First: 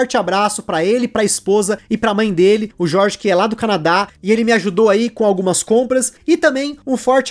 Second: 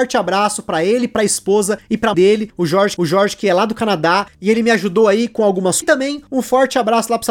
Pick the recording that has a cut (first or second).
second